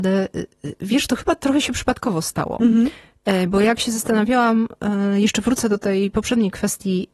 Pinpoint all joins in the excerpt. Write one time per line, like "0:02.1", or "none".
none